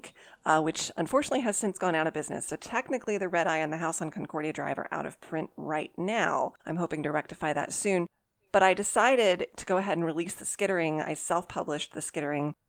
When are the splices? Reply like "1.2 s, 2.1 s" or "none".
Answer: 6.6 s